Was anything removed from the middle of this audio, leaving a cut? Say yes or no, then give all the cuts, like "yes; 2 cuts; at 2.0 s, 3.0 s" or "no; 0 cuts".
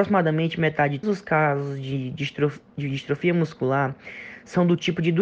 yes; 1 cut; at 1.0 s